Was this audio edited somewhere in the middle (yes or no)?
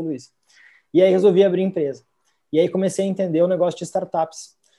no